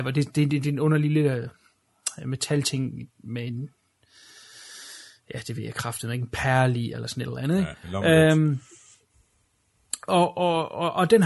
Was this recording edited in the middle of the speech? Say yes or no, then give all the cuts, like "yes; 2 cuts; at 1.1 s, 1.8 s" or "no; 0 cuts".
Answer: no; 0 cuts